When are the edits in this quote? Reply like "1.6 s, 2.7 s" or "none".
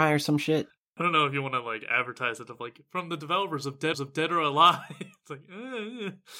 3.9 s